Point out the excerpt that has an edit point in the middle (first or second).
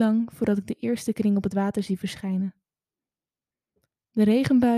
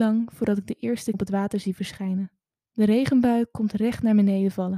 second